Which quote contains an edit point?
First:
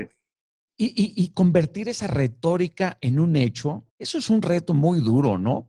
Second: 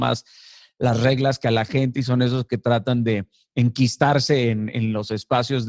first; 1 cut; at 3.9 s

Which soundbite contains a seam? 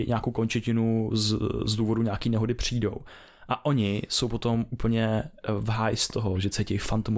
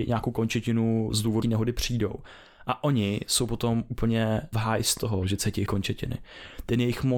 second; 4 cuts; at 1.1 s, 1.4 s, 4.5 s, 5.7 s

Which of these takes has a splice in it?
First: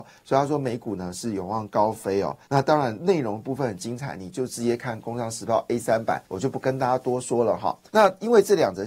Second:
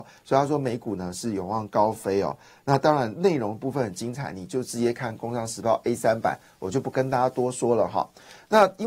first; 3 cuts; at 2.4 s, 6.2 s, 7.9 s

